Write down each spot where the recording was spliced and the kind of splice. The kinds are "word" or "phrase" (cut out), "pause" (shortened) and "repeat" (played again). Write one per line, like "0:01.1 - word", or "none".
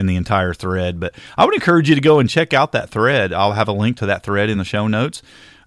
none